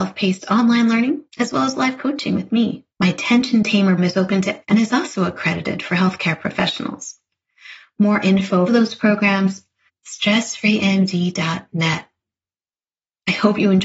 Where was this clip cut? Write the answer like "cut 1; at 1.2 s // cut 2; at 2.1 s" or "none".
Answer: cut 1; at 1.3 s // cut 2; at 2.9 s // cut 3; at 4.0 s // cut 4; at 4.6 s // cut 5; at 8.7 s // cut 6; at 9.9 s

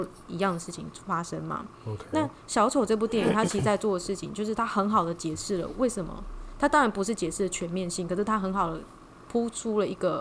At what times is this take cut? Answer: none

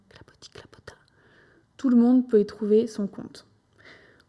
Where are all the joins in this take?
none

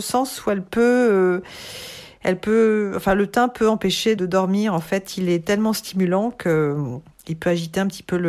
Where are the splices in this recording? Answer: cut 1; at 4.2 s

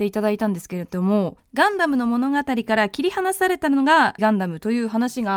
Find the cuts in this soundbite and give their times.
cut 1; at 1.4 s // cut 2; at 4.2 s

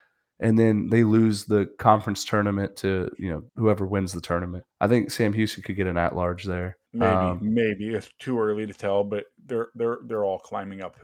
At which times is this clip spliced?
cut 1; at 3.5 s // cut 2; at 4.7 s // cut 3; at 6.9 s

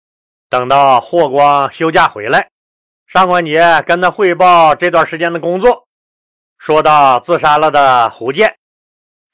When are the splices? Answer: none

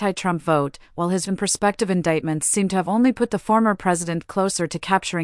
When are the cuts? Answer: cut 1; at 1.3 s

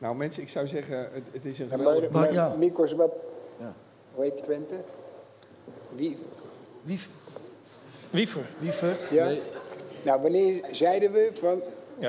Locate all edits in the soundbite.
cut 1; at 4.4 s

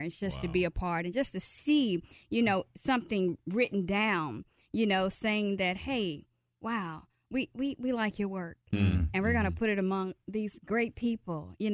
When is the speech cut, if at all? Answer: none

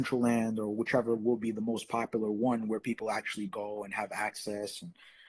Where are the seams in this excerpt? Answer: cut 1; at 3.5 s

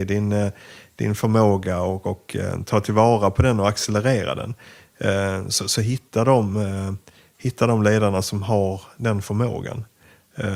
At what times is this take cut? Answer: none

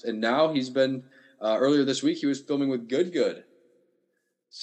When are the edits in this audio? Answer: none

